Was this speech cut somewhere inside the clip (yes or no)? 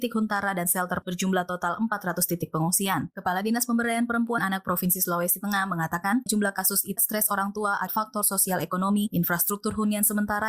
yes